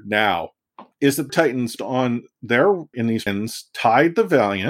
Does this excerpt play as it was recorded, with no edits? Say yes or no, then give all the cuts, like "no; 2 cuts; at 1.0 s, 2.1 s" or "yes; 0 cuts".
no; 5 cuts; at 0.9 s, 1.3 s, 1.8 s, 2.9 s, 3.3 s